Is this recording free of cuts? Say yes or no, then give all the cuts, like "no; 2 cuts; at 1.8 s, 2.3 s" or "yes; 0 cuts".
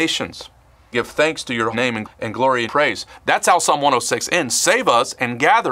no; 4 cuts; at 0.9 s, 1.7 s, 2.0 s, 2.7 s